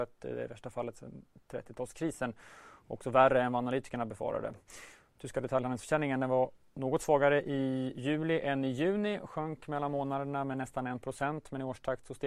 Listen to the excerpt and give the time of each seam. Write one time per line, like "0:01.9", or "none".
none